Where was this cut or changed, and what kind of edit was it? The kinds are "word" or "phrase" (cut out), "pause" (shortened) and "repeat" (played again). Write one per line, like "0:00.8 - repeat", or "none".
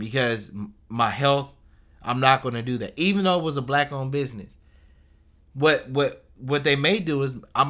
none